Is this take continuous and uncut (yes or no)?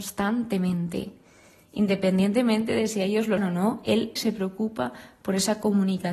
no